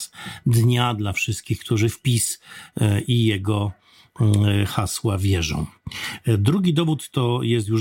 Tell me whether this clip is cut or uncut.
uncut